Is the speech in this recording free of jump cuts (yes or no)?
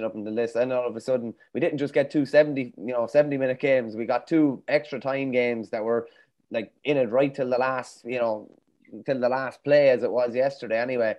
yes